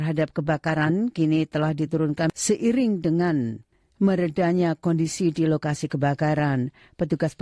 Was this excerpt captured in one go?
yes; 0 cuts

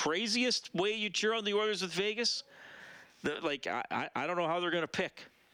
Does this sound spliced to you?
no; 0 cuts

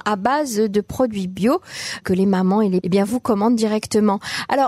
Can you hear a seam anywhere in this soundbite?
yes; 2 cuts; at 2.0 s, 2.8 s

